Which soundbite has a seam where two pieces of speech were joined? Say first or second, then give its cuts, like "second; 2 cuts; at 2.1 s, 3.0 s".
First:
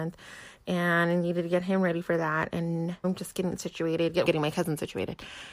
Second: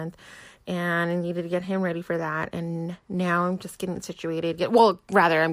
first; 2 cuts; at 3.0 s, 4.2 s